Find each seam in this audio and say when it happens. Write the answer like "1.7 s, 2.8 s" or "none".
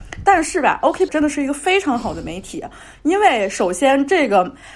1.1 s